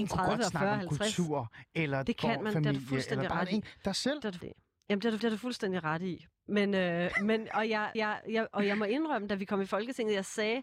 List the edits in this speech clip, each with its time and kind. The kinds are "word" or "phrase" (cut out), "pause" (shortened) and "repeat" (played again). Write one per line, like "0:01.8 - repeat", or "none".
0:04.4 - phrase
0:05.2 - repeat
0:07.9 - repeat